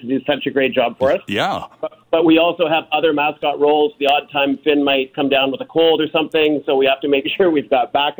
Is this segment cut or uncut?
uncut